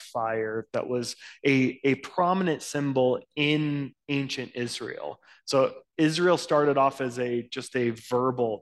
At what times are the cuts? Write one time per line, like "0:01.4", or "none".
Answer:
0:05.9